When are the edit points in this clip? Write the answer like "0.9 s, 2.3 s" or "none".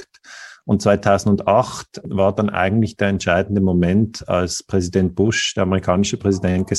none